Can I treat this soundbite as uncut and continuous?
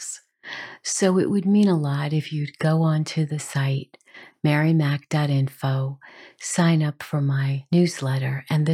yes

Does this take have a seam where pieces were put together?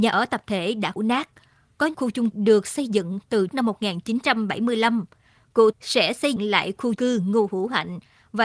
yes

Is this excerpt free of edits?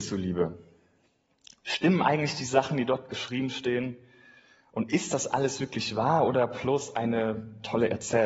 yes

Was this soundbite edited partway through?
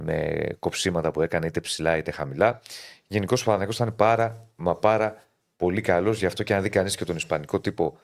no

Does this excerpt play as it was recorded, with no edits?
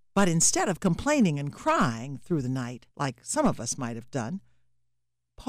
no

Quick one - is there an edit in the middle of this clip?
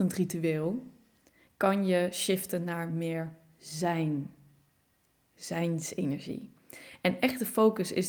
no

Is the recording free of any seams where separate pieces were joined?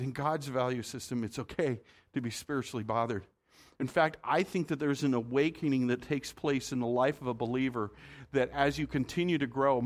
yes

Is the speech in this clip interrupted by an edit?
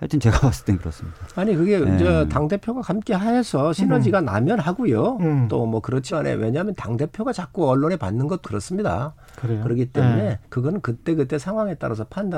yes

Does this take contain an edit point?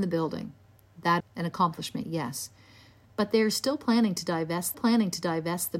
yes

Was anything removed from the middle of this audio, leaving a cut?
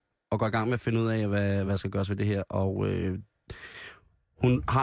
yes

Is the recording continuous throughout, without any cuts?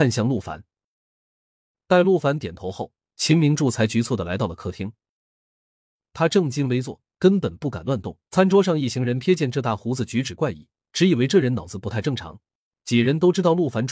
no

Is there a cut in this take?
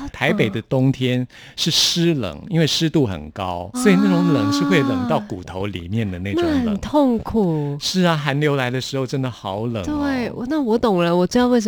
yes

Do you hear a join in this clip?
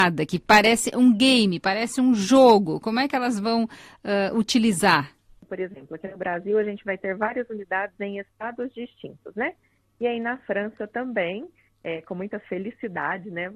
no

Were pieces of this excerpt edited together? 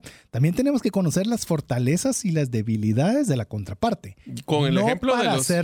no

